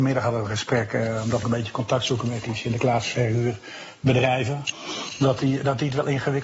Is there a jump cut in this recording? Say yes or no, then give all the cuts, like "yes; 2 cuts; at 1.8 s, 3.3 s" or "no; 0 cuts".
yes; 1 cut; at 1.4 s